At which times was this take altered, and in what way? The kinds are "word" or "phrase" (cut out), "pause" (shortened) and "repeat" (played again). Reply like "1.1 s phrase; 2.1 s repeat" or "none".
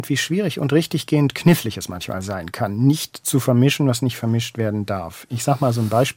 none